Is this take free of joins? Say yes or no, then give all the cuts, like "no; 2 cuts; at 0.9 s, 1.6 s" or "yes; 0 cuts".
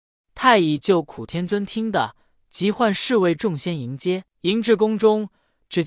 no; 1 cut; at 4.3 s